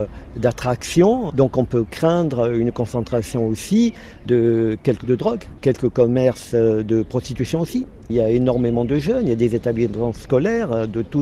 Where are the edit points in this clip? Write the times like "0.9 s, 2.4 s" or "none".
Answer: 5.0 s

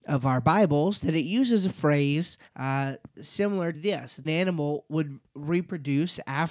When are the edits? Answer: 2.5 s, 3.7 s, 4.3 s

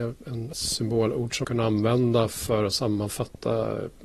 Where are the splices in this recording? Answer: 1.4 s

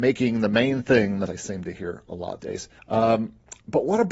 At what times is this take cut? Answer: 1.3 s, 2.4 s, 2.8 s

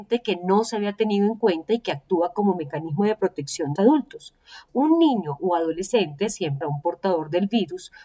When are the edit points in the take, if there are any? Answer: 3.8 s, 4.7 s, 6.6 s

